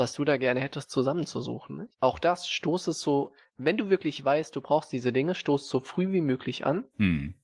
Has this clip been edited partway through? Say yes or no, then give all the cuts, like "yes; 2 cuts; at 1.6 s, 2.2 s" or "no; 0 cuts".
yes; 1 cut; at 1.9 s